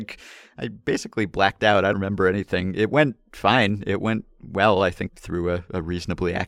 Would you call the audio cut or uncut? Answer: cut